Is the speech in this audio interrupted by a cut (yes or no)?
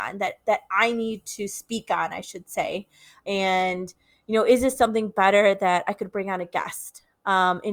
no